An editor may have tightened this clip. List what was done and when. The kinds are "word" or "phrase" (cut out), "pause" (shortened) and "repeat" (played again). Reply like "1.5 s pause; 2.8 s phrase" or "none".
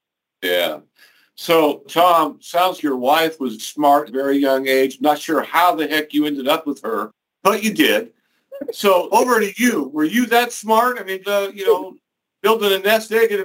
1.8 s word; 2.8 s word; 3.6 s word; 4.1 s phrase; 9.1 s word; 11.2 s phrase